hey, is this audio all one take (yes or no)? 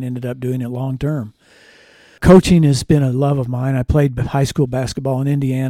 yes